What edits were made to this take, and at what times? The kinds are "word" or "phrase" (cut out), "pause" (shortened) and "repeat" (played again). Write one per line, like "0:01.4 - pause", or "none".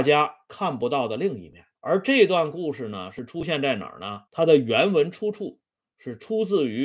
0:01.8 - pause
0:04.3 - pause